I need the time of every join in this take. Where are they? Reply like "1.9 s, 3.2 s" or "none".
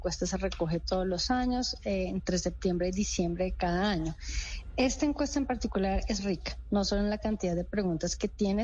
6.2 s